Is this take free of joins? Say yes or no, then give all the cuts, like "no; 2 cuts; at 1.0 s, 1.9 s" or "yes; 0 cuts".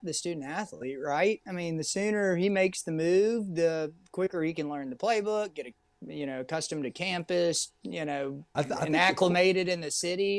yes; 0 cuts